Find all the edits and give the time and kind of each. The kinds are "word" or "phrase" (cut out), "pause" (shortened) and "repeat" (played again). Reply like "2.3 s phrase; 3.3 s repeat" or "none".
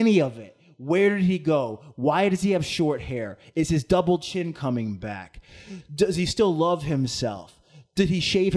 none